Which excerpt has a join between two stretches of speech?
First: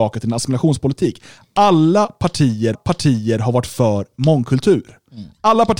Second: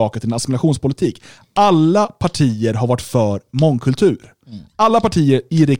first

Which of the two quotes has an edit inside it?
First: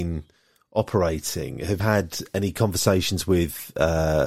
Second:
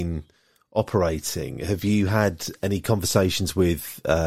first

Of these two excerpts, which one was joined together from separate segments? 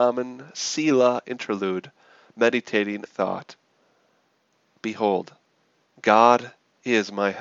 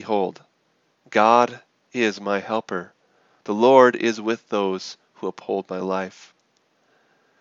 first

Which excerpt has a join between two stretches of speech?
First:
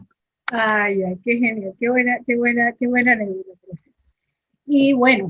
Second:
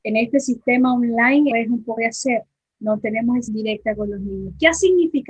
second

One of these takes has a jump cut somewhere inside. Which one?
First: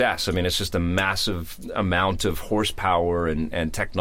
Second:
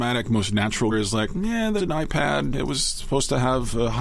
second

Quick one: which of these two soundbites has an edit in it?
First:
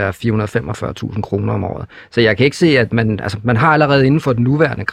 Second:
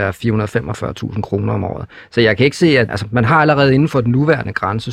second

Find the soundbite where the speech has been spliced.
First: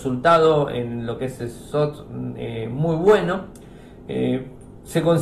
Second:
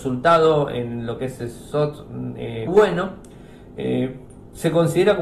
second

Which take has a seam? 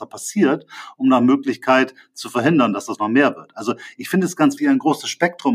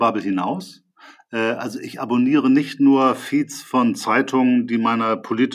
first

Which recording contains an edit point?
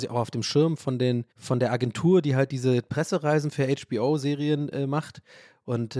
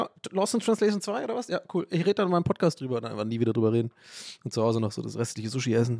first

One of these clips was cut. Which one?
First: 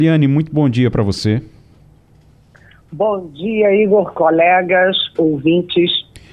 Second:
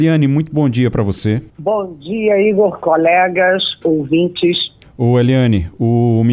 second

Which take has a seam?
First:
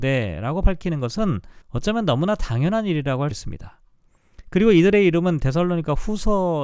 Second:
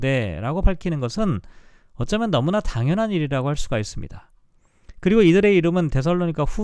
first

